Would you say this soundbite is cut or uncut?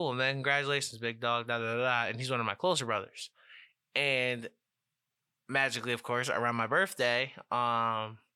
uncut